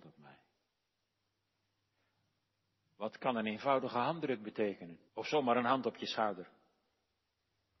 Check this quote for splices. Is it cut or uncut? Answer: cut